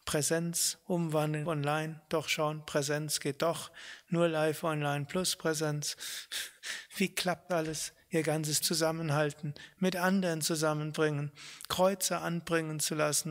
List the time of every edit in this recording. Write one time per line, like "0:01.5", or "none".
0:01.4
0:07.5
0:08.6

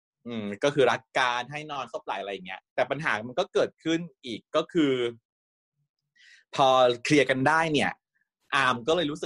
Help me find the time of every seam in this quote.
0:02.7

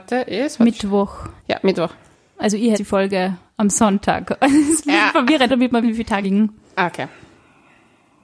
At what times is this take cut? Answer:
0:01.4
0:02.1
0:02.7
0:05.5
0:05.8
0:06.2

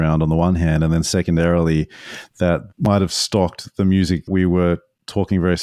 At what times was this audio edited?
0:02.7
0:04.3

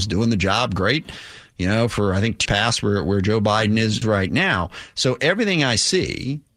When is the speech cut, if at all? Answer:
0:02.5
0:04.0

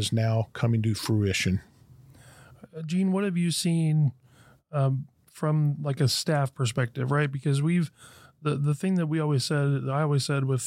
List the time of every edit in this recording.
none

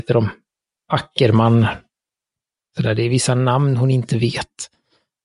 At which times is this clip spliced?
none

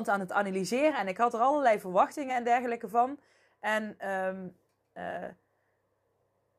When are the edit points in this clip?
none

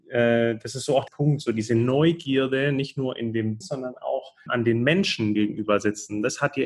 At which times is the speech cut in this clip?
0:01.1
0:03.6
0:04.5
0:05.4

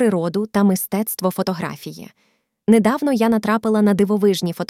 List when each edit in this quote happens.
none

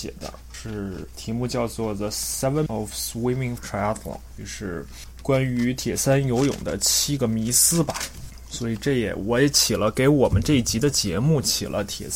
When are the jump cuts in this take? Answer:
0:02.7
0:03.6

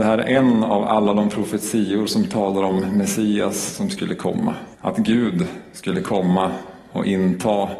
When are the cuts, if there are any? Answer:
0:04.7

